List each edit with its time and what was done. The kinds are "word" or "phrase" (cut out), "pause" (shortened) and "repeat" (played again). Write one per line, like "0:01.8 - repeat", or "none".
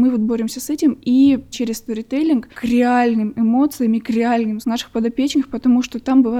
0:01.5 - word
0:02.5 - word
0:04.6 - word